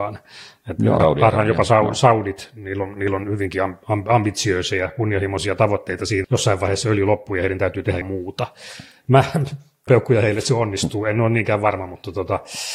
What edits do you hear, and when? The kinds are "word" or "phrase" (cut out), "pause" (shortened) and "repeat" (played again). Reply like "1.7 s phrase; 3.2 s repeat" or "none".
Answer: 1.0 s word; 6.2 s word; 8.0 s word; 9.9 s word